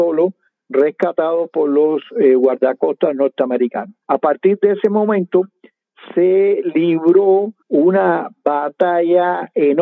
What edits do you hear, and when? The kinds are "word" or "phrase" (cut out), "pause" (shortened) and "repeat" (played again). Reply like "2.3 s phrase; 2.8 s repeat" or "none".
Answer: 4.0 s pause; 7.6 s pause